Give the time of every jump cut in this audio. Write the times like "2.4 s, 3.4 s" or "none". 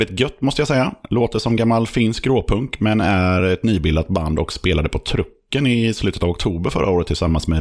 none